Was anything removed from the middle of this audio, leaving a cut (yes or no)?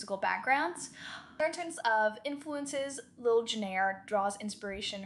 no